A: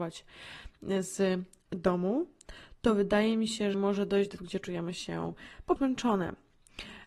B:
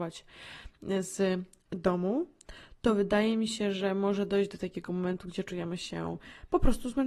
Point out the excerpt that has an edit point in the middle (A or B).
A